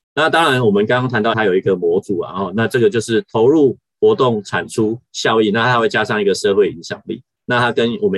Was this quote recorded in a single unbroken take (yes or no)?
no